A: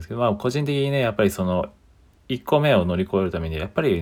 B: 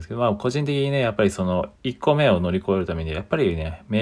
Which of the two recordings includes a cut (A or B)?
B